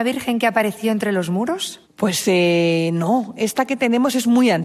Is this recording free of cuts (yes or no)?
no